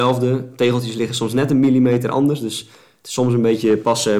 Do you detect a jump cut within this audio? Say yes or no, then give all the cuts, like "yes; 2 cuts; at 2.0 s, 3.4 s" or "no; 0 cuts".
no; 0 cuts